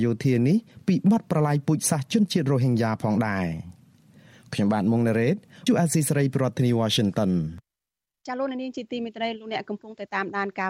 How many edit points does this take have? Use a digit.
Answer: 2